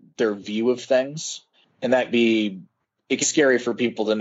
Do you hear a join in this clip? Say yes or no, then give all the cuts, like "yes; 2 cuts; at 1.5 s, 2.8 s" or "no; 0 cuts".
yes; 3 cuts; at 1.5 s, 2.1 s, 3.2 s